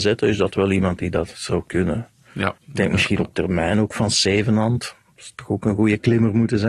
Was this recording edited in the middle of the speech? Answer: yes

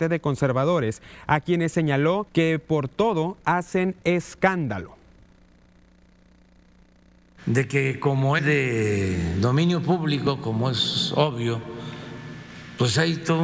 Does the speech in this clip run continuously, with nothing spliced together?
no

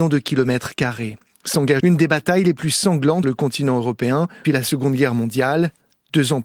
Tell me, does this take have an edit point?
yes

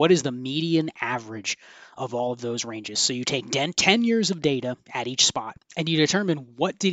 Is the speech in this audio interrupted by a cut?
yes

